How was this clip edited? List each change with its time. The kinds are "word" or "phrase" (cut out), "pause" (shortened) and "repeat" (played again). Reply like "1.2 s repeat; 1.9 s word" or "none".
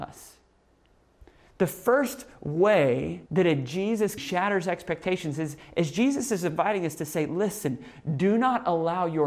3.3 s pause; 4.2 s word